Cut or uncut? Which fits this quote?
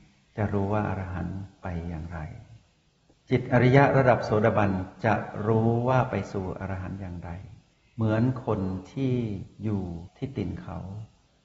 uncut